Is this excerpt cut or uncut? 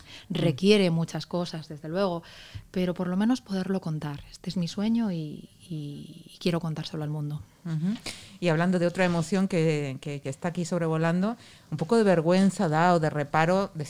uncut